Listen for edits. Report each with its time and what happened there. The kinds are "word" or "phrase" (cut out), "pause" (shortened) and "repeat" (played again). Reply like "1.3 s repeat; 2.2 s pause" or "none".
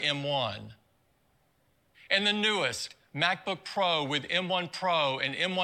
none